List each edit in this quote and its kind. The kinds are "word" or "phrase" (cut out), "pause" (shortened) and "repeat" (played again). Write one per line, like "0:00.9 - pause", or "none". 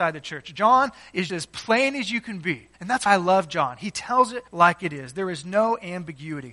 0:01.3 - word
0:02.7 - pause
0:03.1 - word
0:04.5 - pause

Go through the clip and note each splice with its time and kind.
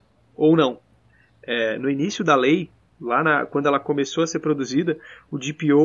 none

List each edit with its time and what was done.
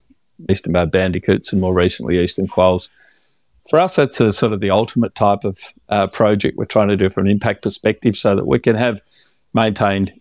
none

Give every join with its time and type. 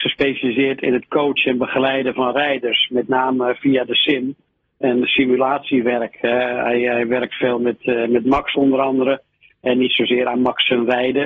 none

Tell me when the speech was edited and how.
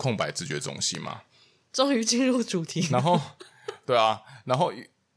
none

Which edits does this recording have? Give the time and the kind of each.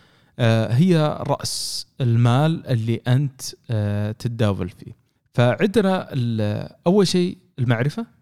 0:05.2 - pause

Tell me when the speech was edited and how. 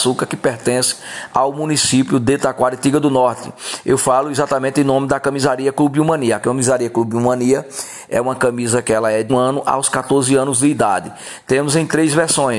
0:09.3 - word

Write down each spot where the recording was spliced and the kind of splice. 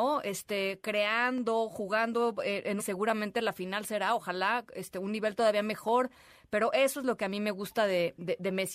0:02.8 - phrase

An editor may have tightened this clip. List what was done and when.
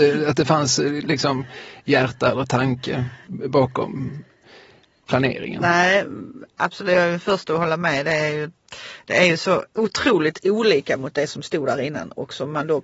0:03.2 - pause
0:09.7 - pause

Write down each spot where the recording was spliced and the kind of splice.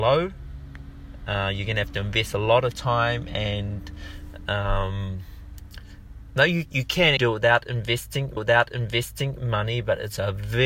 0:07.2 - word
0:08.4 - repeat

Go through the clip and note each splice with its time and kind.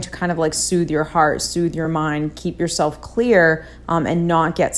none

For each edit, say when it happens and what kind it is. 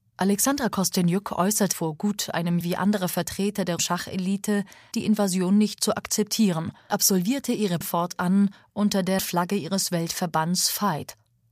0:01.7 - word
0:02.6 - word
0:03.8 - word
0:04.9 - word
0:05.8 - word
0:06.9 - word
0:07.8 - word
0:09.2 - word

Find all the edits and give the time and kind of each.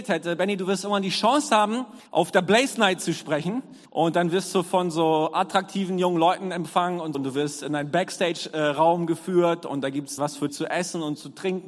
0:02.1 - pause
0:03.9 - pause
0:07.1 - word
0:10.2 - word
0:10.5 - word

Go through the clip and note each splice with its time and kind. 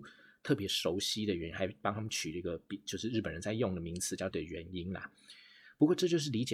0:04.3 - word

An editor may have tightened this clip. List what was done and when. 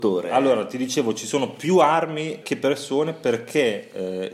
0:02.4 - word

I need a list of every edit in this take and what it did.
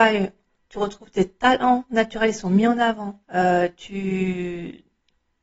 0:03.2 - pause

